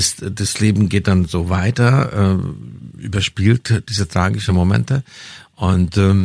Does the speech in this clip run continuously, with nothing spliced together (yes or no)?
yes